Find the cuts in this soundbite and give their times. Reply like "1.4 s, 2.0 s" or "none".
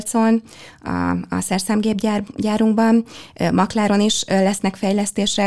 none